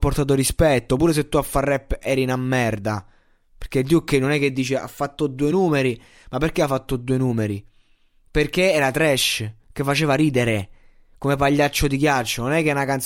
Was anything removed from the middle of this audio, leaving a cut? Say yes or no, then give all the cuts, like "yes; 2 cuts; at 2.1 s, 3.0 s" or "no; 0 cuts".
no; 0 cuts